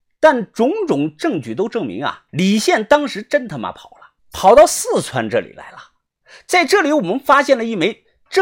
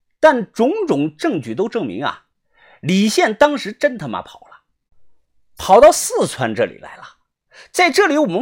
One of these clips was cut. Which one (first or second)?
first